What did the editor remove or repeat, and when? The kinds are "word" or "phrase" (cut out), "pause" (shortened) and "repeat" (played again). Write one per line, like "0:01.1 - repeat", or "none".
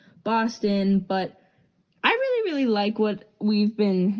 none